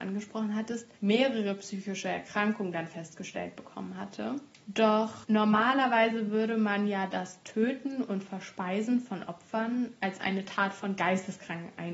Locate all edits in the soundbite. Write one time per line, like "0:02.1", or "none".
0:00.9